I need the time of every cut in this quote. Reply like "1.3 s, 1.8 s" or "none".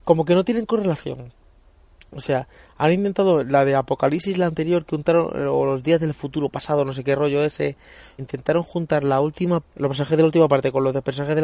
8.2 s, 9.6 s